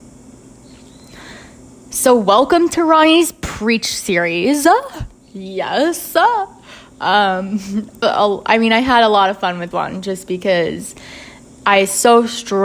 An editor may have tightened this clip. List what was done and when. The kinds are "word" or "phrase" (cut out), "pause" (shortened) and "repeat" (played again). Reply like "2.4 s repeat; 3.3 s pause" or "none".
8.0 s word; 9.7 s word